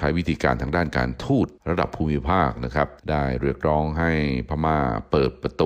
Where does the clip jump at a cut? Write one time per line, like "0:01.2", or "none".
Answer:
0:01.6
0:03.0

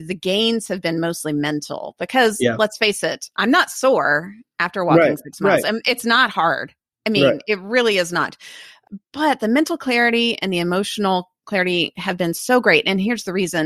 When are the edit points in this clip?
none

